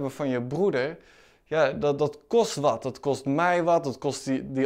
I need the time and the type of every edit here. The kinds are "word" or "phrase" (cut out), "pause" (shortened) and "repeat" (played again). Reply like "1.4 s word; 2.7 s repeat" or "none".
none